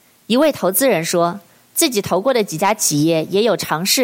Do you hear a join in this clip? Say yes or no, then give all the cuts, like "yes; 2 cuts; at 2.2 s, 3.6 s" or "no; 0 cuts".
no; 0 cuts